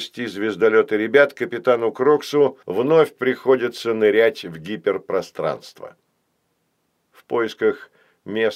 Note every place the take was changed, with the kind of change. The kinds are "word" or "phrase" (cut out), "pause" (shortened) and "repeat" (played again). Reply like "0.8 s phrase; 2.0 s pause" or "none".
2.6 s pause